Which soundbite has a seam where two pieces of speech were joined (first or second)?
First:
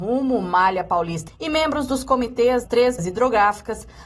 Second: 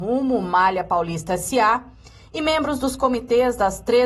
first